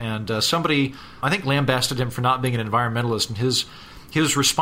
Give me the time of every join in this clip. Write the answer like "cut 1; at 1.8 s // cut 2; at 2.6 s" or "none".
cut 1; at 1.2 s